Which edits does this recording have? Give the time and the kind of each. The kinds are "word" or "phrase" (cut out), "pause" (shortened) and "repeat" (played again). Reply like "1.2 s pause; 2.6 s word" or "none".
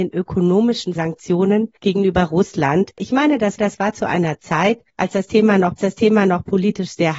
1.0 s phrase; 1.8 s pause; 3.6 s repeat; 4.9 s pause; 5.8 s repeat